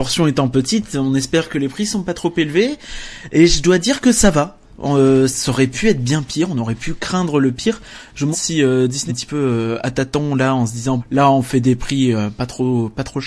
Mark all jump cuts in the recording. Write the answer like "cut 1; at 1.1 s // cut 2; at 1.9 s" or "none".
cut 1; at 8.3 s // cut 2; at 9.1 s // cut 3; at 11.0 s